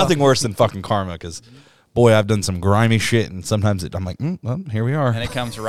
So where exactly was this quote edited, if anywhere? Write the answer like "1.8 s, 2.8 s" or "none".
none